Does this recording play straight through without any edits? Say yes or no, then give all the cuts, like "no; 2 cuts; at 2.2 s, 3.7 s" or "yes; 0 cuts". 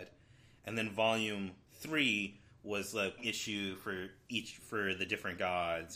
no; 2 cuts; at 1.6 s, 3.2 s